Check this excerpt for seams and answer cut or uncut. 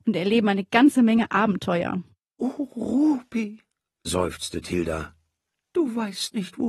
uncut